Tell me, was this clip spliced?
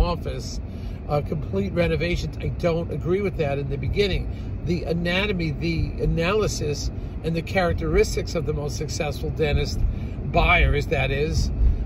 no; 0 cuts

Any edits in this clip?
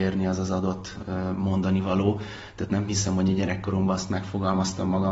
no; 0 cuts

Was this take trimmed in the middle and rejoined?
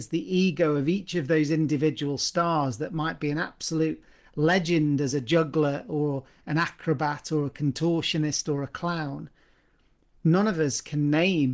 no; 0 cuts

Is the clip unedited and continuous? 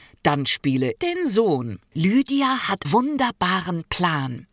no; 3 cuts; at 1.0 s, 1.9 s, 2.8 s

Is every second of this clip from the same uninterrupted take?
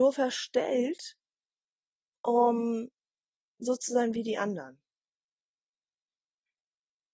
yes; 0 cuts

